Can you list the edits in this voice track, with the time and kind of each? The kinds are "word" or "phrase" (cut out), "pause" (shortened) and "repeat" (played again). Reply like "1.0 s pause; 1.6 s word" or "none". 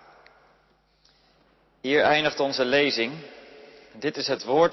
none